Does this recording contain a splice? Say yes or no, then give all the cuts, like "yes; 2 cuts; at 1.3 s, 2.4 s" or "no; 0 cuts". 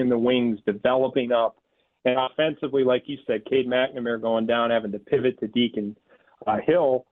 no; 0 cuts